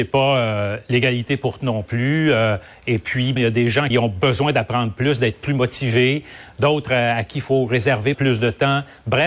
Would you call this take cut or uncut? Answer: cut